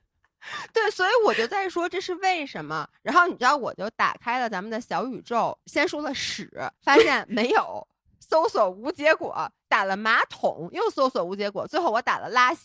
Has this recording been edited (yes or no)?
yes